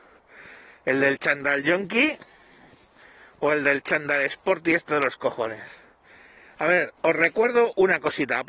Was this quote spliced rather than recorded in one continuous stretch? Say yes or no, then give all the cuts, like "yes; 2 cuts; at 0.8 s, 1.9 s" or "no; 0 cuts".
no; 0 cuts